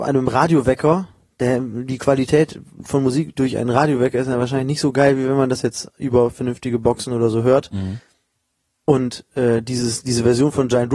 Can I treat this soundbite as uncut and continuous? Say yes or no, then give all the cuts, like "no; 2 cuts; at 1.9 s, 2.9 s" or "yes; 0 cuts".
yes; 0 cuts